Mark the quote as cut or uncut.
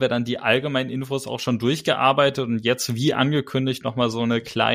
uncut